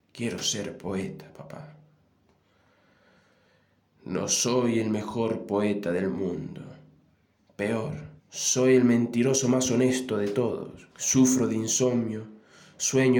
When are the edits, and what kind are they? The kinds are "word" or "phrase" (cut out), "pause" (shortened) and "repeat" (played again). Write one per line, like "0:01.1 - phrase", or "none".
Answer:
0:08.2 - pause
0:10.9 - pause